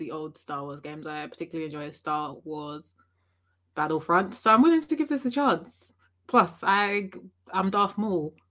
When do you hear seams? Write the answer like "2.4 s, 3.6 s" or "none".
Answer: none